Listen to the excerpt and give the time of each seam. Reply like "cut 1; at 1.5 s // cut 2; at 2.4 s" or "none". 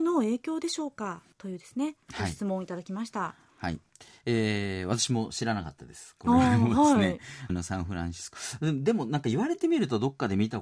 cut 1; at 1.3 s // cut 2; at 7.5 s